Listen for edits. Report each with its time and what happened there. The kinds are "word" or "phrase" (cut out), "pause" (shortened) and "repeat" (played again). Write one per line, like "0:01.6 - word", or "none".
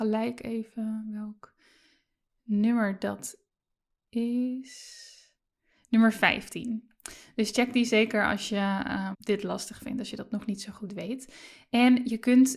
0:09.1 - word